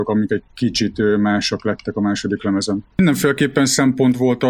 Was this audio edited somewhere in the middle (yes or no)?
yes